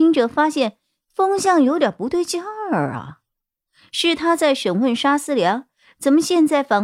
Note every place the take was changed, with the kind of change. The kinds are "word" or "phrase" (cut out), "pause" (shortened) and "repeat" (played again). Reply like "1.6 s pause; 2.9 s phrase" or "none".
none